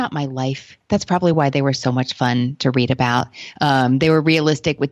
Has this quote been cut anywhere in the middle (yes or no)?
no